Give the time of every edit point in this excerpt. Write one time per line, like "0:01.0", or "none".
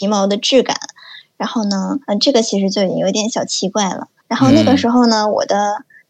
0:02.0
0:04.2